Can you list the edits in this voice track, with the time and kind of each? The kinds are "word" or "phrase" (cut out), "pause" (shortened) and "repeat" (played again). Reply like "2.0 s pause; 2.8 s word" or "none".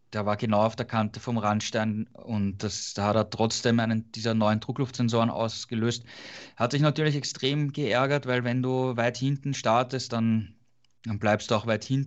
none